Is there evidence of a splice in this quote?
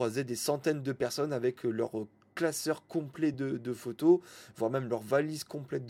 no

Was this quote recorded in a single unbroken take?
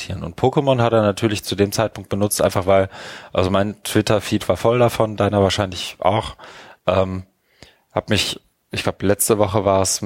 yes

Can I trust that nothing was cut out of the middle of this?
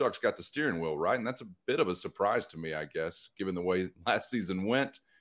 no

